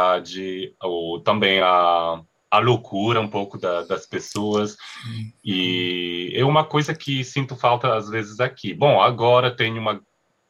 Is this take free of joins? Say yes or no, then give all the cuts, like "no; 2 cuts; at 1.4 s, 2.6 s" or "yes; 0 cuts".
yes; 0 cuts